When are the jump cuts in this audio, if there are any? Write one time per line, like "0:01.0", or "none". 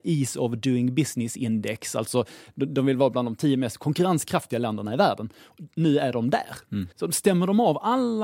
0:06.9